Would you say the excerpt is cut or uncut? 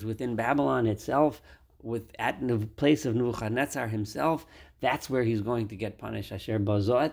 uncut